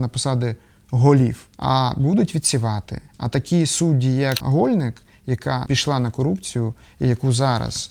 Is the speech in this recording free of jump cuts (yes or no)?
no